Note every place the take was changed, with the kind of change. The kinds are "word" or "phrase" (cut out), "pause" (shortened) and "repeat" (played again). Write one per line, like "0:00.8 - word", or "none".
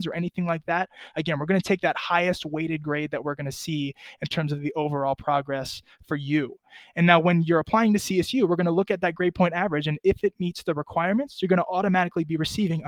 none